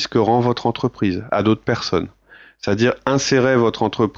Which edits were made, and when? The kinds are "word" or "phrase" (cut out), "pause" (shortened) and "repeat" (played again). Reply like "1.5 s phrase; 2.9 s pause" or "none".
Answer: none